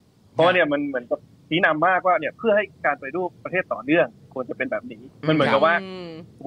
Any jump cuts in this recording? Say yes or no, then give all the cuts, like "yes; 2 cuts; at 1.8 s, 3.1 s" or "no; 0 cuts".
no; 0 cuts